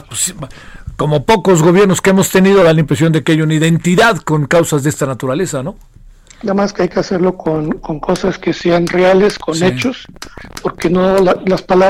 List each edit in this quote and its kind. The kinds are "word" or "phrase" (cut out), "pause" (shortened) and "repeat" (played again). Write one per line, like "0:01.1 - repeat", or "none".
none